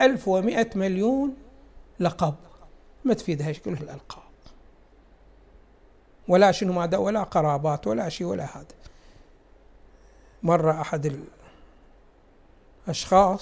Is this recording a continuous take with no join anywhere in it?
no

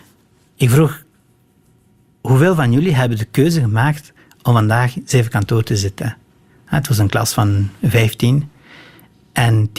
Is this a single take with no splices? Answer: yes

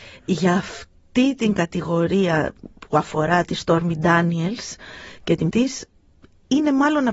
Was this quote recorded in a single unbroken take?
no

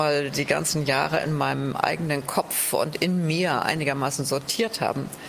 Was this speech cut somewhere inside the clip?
no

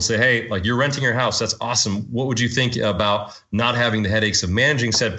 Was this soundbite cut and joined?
no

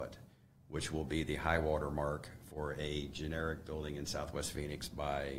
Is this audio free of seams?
yes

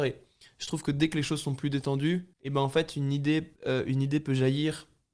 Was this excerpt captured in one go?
no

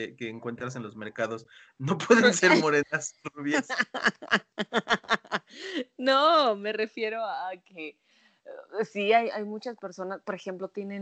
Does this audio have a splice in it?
no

